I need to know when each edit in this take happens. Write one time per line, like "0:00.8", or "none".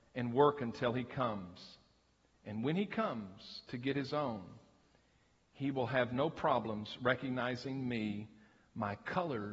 none